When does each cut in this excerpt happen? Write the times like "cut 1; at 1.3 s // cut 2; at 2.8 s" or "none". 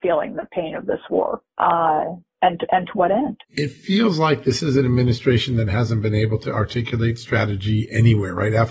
cut 1; at 3.4 s